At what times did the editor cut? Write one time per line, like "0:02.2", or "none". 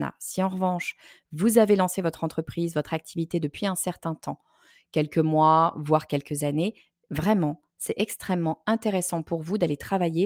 none